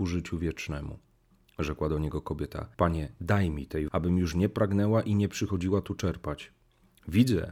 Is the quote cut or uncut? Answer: cut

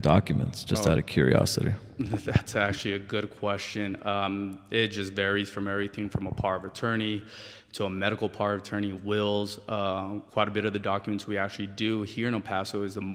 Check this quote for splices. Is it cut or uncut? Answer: cut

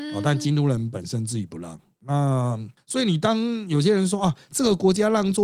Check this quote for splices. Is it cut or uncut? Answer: uncut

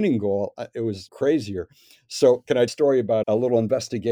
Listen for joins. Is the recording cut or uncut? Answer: cut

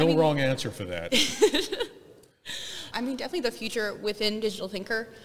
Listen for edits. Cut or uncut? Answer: cut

